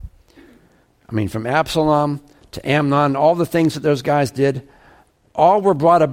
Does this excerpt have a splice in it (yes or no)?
no